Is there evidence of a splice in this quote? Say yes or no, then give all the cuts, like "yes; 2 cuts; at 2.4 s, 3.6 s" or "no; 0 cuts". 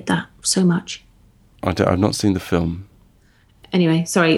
no; 0 cuts